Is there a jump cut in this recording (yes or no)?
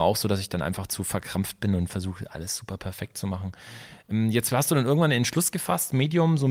no